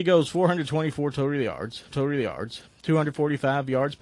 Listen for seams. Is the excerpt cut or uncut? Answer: cut